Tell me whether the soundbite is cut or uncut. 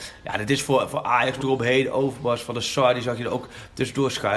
cut